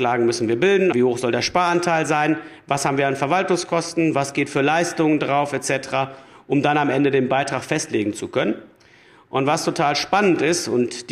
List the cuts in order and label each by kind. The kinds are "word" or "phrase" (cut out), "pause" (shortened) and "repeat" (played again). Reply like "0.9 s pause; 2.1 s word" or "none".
0.9 s word